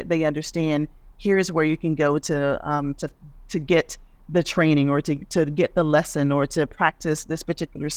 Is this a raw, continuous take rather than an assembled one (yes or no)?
yes